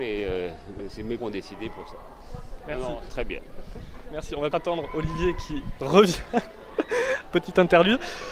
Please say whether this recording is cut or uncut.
cut